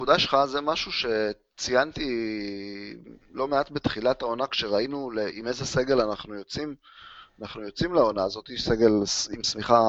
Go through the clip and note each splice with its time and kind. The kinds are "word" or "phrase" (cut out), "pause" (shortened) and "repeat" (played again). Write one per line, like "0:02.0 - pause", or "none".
none